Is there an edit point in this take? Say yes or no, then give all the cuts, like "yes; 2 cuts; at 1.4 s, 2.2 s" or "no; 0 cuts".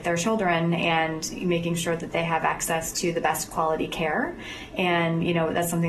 no; 0 cuts